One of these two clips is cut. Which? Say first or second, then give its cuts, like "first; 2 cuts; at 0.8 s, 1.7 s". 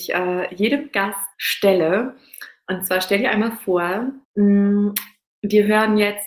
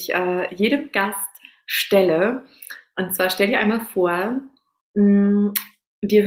first; 2 cuts; at 1.3 s, 4.2 s